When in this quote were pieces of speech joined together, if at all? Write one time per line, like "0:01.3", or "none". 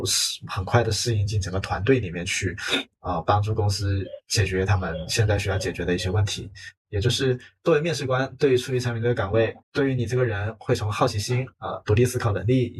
0:09.6
0:11.5